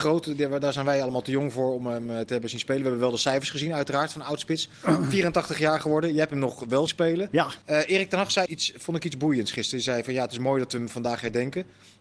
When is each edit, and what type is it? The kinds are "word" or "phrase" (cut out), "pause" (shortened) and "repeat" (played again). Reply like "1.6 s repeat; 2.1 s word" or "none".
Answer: 6.9 s word; 7.6 s pause; 8.5 s word

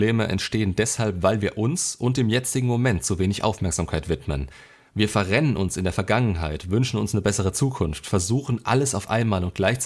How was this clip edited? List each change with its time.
none

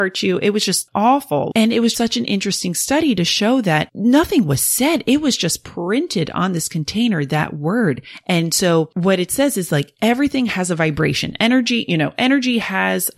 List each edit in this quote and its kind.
1.9 s word

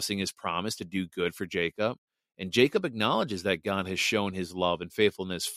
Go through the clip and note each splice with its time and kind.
none

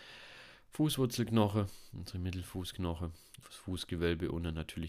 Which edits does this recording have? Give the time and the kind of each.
3.4 s word

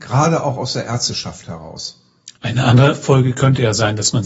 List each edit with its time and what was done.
2.4 s pause

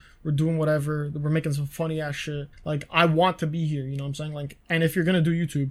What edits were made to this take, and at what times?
2.5 s pause

